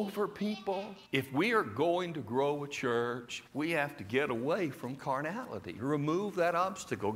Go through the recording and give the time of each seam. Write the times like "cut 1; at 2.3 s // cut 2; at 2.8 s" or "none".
cut 1; at 1.1 s // cut 2; at 3.5 s